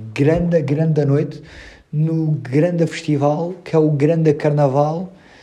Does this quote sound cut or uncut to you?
uncut